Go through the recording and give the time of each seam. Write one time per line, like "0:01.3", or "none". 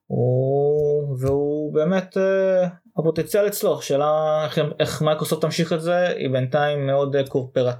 none